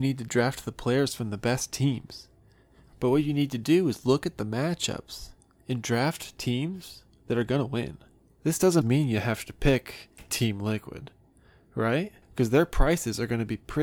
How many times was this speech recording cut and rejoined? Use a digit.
2